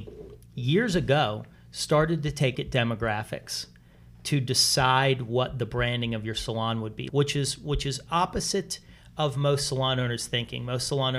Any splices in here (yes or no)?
yes